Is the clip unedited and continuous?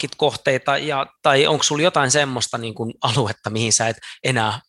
no; 1 cut; at 1.2 s

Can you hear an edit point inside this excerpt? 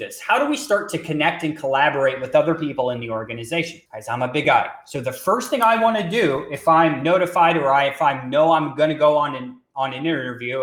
yes; 2 cuts; at 3.9 s, 4.4 s

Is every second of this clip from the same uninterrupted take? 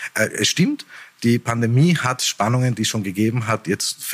yes; 0 cuts

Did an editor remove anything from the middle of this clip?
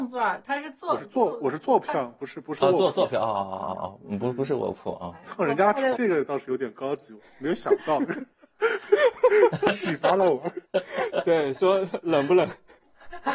yes; 3 cuts; at 5.9 s, 8.3 s, 10.6 s

